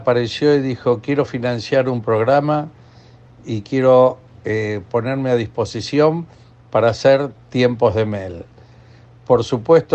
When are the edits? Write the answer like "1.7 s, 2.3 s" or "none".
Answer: none